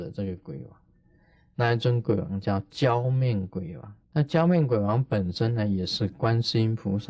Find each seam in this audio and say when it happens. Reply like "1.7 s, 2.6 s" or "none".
4.0 s